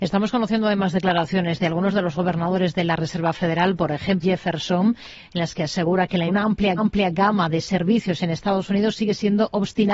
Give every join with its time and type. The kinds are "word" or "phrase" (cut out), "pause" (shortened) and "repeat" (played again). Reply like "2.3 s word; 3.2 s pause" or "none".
4.2 s phrase; 6.3 s phrase; 6.8 s repeat